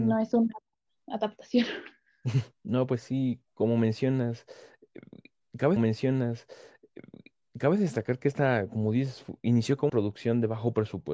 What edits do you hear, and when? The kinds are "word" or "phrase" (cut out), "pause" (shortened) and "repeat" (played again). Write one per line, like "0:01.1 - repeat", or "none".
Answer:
0:02.5 - pause
0:05.8 - repeat
0:09.9 - word